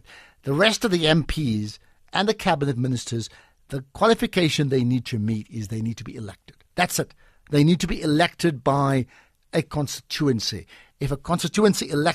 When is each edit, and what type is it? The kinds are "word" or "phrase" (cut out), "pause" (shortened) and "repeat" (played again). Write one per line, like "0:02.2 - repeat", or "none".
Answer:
0:06.6 - pause